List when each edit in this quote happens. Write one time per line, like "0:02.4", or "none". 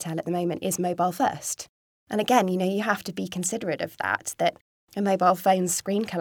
none

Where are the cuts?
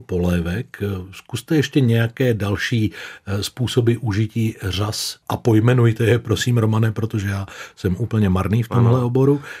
0:05.2

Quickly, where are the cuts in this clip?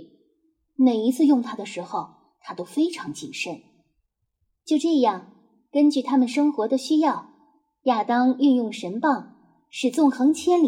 none

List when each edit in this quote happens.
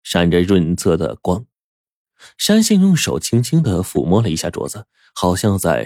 none

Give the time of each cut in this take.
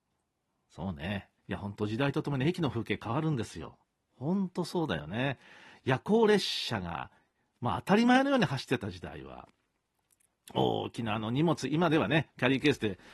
0:01.4

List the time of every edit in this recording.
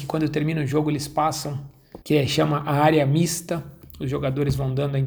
0:02.0

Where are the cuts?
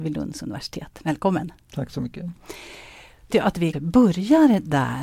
0:03.3
0:03.7

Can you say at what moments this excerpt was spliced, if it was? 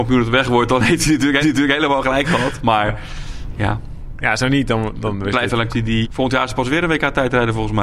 0:01.4
0:05.7
0:06.0

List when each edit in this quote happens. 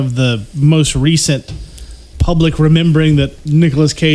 0:02.1

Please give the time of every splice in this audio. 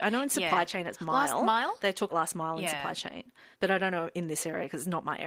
0:02.1
0:03.5

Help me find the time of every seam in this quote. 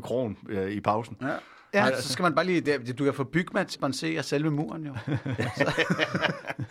0:03.7

